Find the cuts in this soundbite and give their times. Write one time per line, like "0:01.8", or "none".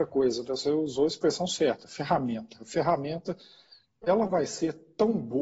none